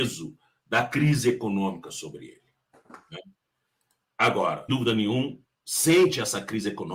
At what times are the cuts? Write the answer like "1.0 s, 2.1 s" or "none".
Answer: 4.7 s